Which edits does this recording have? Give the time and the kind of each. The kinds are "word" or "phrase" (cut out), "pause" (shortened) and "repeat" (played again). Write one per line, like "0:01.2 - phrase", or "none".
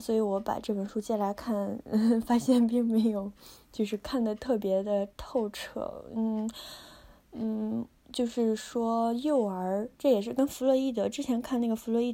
0:09.9 - pause

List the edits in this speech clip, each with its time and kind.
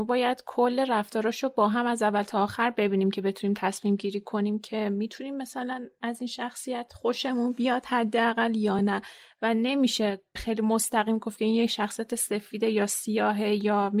none

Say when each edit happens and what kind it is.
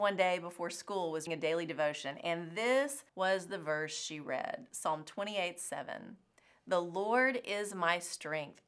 0:01.3 - word
0:03.1 - pause

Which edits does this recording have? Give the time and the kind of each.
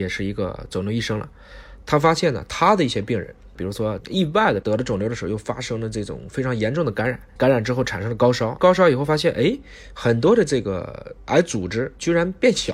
none

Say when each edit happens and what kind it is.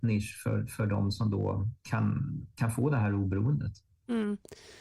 0:01.8 - pause

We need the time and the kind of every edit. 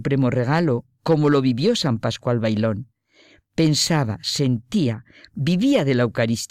none

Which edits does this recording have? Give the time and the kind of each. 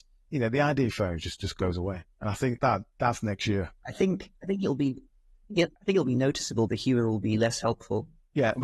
0:00.9 - phrase
0:02.6 - word
0:05.8 - pause
0:06.7 - word

